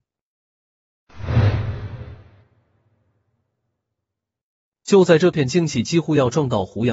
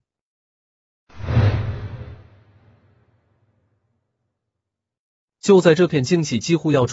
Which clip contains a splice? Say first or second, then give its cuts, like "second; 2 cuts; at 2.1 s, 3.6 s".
first; 1 cut; at 2.4 s